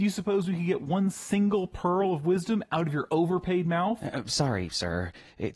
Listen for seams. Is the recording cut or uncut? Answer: uncut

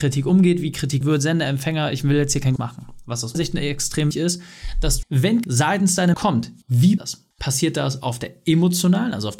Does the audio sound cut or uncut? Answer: cut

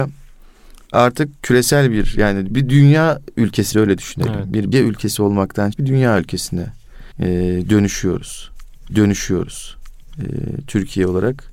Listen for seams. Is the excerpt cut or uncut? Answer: cut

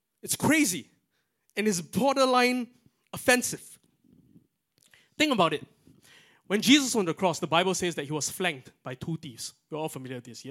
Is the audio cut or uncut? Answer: uncut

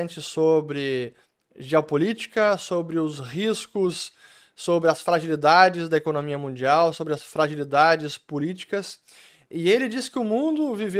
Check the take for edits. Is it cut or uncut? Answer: uncut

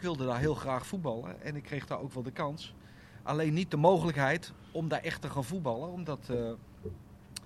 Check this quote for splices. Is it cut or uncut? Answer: uncut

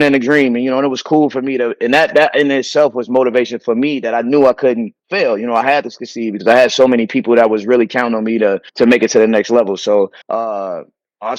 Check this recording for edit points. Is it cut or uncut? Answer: cut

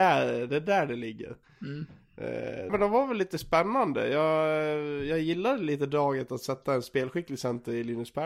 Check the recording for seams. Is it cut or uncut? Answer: cut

